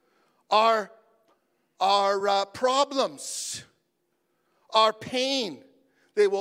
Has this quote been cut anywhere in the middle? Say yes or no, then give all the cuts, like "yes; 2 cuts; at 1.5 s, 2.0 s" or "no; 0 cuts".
no; 0 cuts